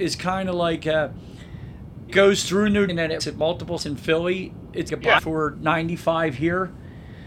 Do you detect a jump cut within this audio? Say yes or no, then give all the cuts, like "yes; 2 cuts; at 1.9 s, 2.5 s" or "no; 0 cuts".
yes; 6 cuts; at 2.1 s, 2.9 s, 3.2 s, 3.8 s, 4.9 s, 5.2 s